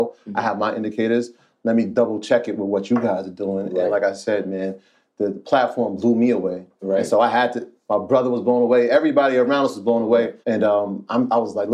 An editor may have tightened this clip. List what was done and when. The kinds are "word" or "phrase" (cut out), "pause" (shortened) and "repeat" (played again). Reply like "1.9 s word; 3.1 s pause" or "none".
10.4 s pause